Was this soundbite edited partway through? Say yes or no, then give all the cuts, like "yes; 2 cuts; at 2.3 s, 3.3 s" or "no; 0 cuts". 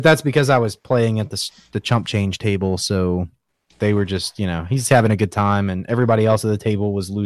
no; 0 cuts